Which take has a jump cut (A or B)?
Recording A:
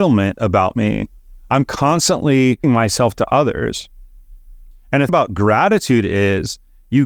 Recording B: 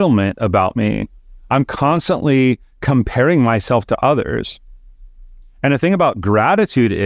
A